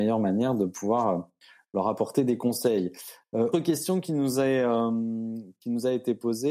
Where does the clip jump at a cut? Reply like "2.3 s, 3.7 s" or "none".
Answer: 3.5 s

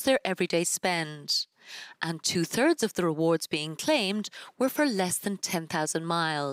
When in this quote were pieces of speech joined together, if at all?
none

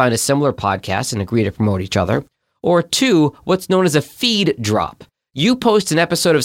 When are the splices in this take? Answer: none

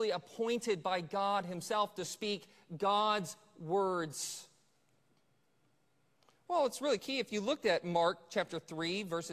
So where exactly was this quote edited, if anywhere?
none

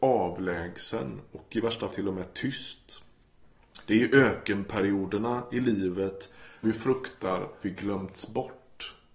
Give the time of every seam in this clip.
1.9 s, 6.6 s, 7.6 s

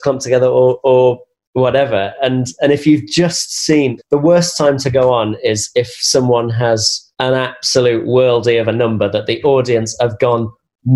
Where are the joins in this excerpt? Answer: 4.0 s, 7.1 s

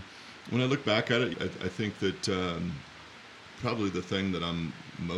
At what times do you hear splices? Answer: 1.3 s

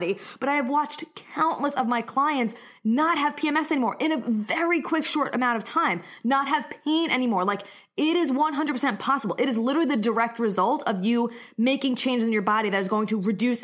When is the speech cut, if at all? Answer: none

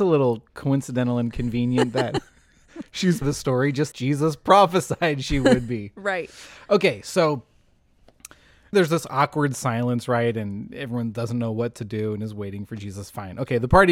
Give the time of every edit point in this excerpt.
3.2 s, 3.9 s, 8.7 s

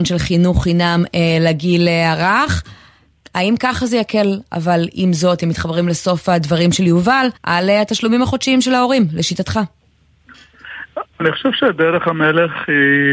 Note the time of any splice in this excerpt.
7.4 s

